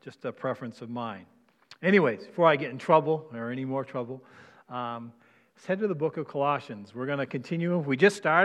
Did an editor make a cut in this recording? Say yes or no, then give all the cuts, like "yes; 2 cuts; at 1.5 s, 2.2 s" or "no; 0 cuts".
no; 0 cuts